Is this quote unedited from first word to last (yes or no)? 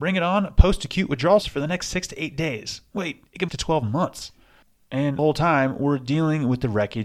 no